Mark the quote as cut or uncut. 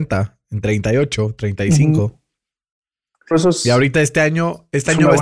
cut